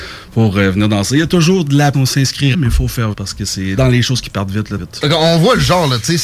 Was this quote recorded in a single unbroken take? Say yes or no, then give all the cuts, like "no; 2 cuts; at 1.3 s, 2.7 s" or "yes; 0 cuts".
no; 5 cuts; at 1.9 s, 2.5 s, 3.1 s, 3.8 s, 4.8 s